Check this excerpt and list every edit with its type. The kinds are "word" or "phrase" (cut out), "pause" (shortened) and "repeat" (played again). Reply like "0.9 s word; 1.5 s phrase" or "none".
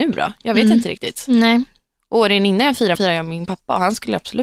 2.9 s word

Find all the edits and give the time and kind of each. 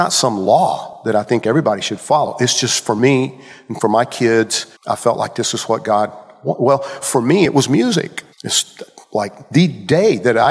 4.8 s pause; 8.3 s pause

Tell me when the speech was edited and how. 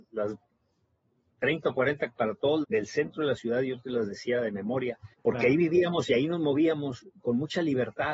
2.1 s word; 2.6 s word; 5.1 s pause

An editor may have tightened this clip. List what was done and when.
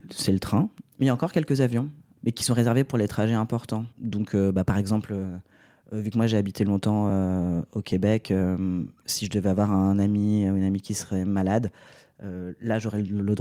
none

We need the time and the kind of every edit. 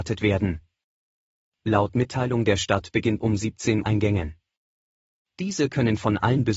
3.2 s phrase; 3.8 s phrase

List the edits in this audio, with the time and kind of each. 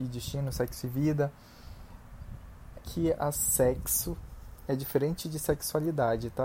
2.7 s word; 3.3 s phrase

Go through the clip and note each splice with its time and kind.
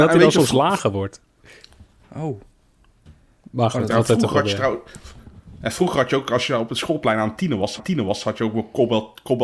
7.8 s repeat

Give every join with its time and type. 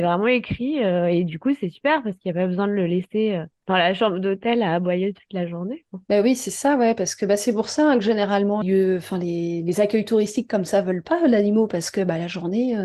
8.6 s phrase

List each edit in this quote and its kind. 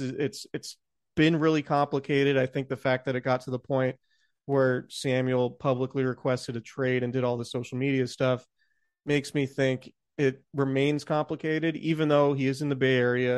none

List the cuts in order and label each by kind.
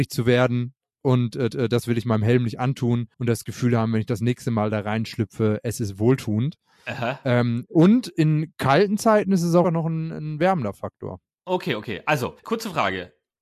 1.5 s repeat; 3.1 s pause; 9.6 s word; 12.4 s pause

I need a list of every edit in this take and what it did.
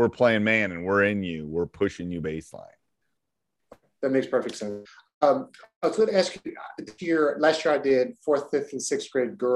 none

